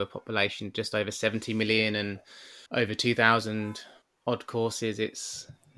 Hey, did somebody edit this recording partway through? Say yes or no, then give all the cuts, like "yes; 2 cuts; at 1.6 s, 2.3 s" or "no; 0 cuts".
yes; 2 cuts; at 2.7 s, 4.0 s